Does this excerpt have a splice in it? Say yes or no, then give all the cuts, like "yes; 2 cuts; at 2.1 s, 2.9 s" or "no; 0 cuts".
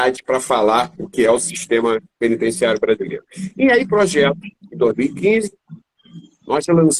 yes; 3 cuts; at 0.9 s, 2.1 s, 3.9 s